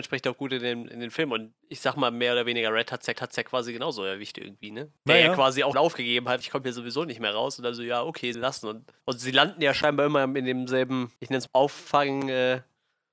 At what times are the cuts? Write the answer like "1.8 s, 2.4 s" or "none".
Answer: 1.6 s, 3.1 s, 5.0 s, 5.7 s, 6.4 s, 8.3 s, 9.0 s, 11.2 s, 11.5 s